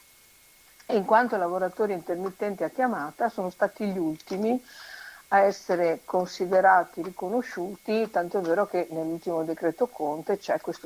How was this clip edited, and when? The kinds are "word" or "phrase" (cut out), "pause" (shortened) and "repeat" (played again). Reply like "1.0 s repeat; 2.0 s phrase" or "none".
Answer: none

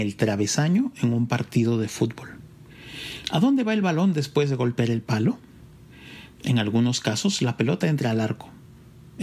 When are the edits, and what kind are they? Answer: none

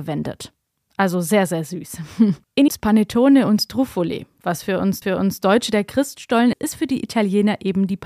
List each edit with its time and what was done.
2.7 s phrase; 5.0 s repeat; 6.5 s word

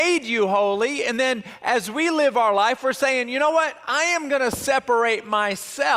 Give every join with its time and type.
none

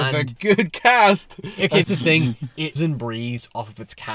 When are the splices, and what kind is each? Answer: 1.8 s word; 2.8 s word

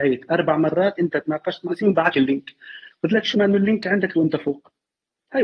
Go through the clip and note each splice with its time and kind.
0.9 s word; 1.7 s word; 2.1 s word; 3.3 s word; 4.1 s word

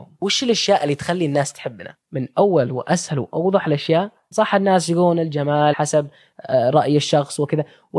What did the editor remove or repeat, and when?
2.0 s pause; 4.3 s phrase; 5.7 s word

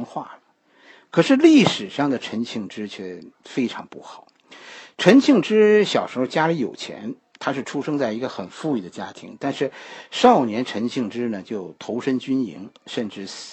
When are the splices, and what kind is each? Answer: 3.3 s pause

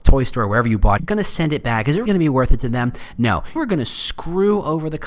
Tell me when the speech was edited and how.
1.0 s word; 2.1 s word; 3.6 s word

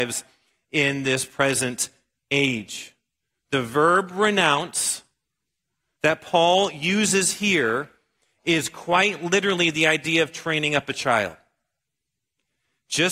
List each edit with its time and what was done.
none

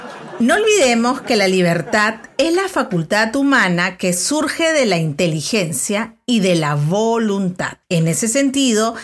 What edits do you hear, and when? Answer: none

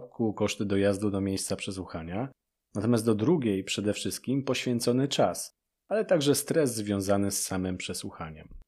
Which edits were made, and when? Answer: none

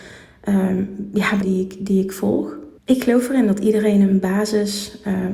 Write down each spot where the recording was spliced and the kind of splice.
1.4 s phrase; 2.8 s pause

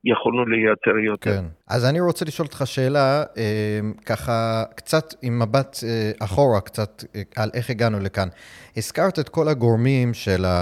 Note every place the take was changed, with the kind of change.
1.6 s pause

